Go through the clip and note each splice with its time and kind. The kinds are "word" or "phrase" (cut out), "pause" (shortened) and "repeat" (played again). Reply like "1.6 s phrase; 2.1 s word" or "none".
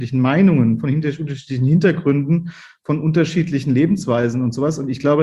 none